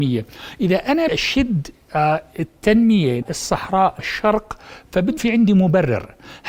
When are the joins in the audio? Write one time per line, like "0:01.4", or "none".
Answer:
0:01.1
0:03.2
0:04.0
0:05.2